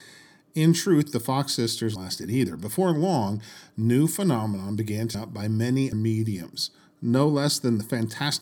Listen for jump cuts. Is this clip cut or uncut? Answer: cut